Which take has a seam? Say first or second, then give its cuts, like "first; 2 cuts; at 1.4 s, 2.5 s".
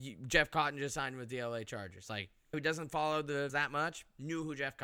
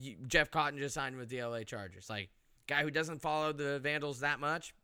first; 2 cuts; at 2.5 s, 3.5 s